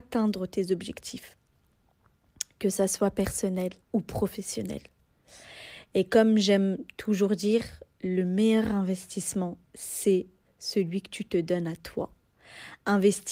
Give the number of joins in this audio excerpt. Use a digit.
3